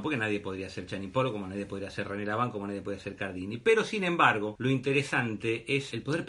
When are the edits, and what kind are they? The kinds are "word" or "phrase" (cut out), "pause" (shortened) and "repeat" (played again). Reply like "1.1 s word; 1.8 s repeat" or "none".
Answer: none

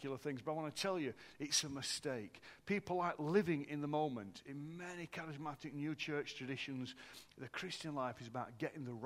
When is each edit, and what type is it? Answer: none

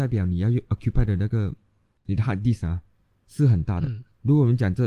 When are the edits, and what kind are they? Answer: none

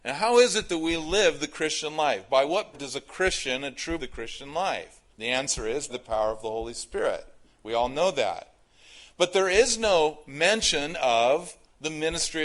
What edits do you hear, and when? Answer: 2.7 s word; 4.0 s phrase; 5.1 s pause; 5.9 s word

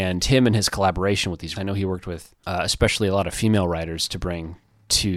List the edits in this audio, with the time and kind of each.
1.6 s word

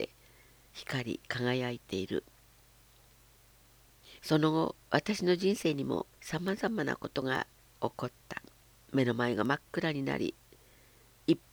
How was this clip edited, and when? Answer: 4.2 s pause; 6.1 s pause; 7.6 s pause; 8.6 s pause

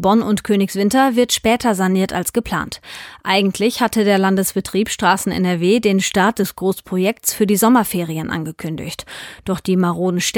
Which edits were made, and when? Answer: none

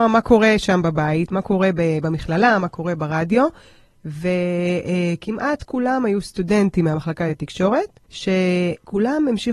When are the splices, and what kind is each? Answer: none

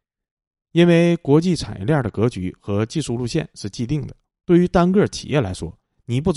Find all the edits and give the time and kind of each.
4.3 s pause

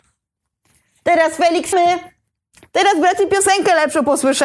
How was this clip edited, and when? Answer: 1.7 s word

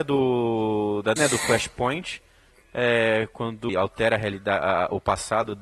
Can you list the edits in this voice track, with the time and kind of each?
1.2 s word; 3.7 s phrase

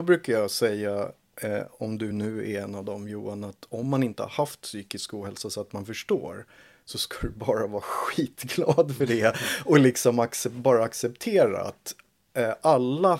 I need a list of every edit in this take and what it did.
none

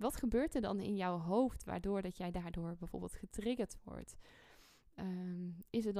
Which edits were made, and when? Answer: none

